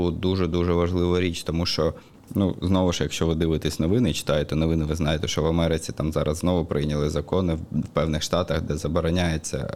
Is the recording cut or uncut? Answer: uncut